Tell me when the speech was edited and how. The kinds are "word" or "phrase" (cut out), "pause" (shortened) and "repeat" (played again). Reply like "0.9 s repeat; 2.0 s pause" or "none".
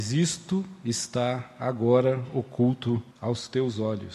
3.1 s pause